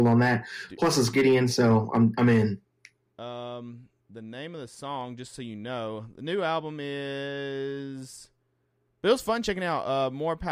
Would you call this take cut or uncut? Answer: uncut